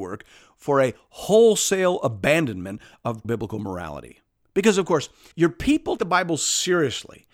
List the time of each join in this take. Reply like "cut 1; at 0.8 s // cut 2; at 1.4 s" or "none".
cut 1; at 3.2 s // cut 2; at 5.3 s // cut 3; at 6.0 s